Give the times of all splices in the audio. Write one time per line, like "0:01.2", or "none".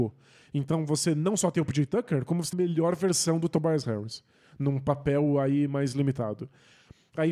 0:02.5

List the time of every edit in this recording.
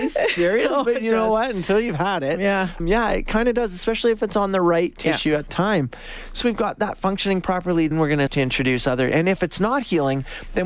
0:02.8
0:05.5
0:06.4
0:07.9
0:08.3

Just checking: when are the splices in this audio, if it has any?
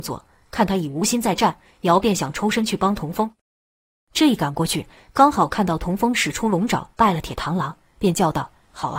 none

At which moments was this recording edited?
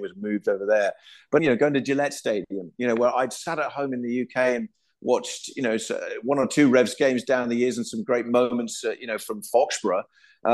0:01.4

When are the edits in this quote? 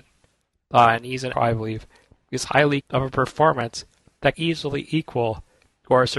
0:01.3
0:02.8
0:04.3

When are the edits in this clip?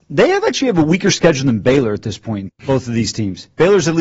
0:02.5

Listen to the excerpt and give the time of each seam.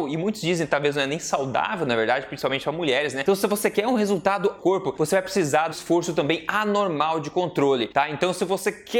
0:04.6
0:05.7

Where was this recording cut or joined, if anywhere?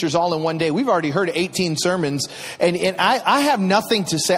none

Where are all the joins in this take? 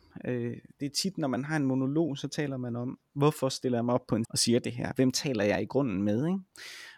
0:04.2

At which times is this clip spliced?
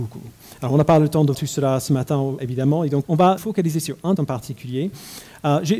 0:01.3
0:02.4
0:03.0
0:03.4
0:04.2

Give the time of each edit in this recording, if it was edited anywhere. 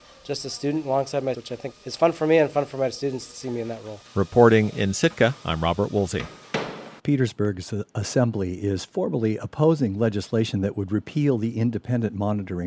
0:01.3
0:01.7
0:07.0

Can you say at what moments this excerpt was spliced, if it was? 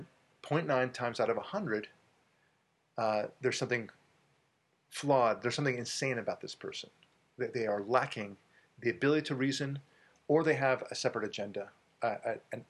none

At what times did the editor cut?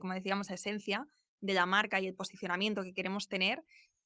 none

